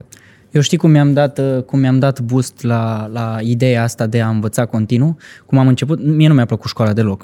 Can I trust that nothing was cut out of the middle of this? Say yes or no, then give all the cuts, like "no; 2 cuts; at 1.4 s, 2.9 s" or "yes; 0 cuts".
yes; 0 cuts